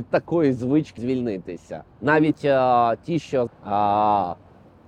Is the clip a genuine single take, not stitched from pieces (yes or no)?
no